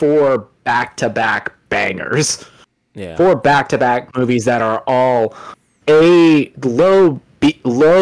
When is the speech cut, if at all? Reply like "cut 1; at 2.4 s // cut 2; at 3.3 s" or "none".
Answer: none